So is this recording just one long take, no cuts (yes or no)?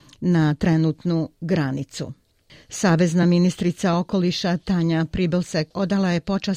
yes